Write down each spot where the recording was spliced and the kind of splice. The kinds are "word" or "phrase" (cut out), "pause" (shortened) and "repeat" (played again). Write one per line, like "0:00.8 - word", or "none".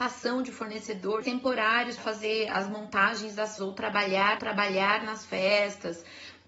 0:01.2 - phrase
0:02.0 - word
0:03.6 - word
0:04.4 - repeat